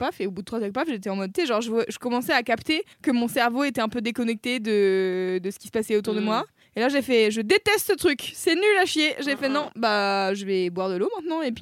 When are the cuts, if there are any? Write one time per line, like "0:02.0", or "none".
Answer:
0:02.9
0:06.6

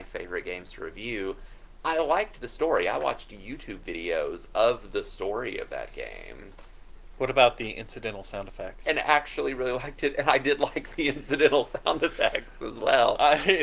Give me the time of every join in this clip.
none

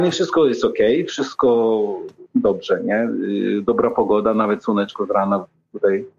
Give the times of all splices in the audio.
0:02.3

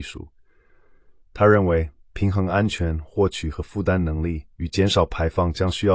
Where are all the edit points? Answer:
0:04.5

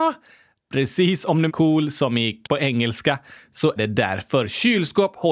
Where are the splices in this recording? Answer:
0:01.5
0:02.4
0:03.8

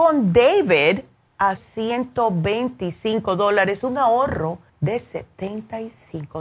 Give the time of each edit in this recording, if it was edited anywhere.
0:01.6
0:04.7

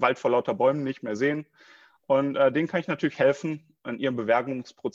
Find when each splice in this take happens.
none

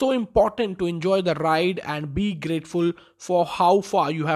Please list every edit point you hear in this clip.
none

